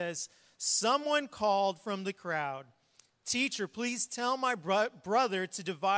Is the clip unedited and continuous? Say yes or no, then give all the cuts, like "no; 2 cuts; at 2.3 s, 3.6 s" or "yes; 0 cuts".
yes; 0 cuts